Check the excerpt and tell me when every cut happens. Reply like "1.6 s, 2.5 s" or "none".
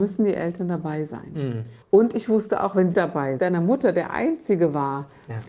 1.8 s, 2.9 s, 3.4 s